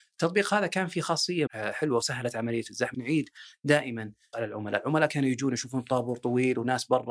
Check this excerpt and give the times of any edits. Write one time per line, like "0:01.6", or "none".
0:01.5
0:02.9
0:04.3

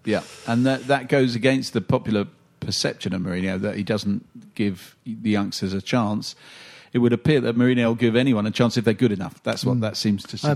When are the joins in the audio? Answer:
none

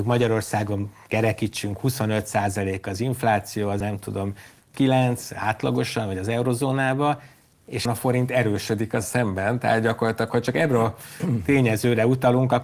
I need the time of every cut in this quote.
0:03.8
0:04.7
0:07.9
0:09.0

